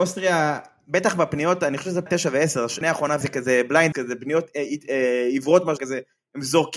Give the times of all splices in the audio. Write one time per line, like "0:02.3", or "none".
0:02.1
0:02.8
0:03.2
0:03.9
0:05.8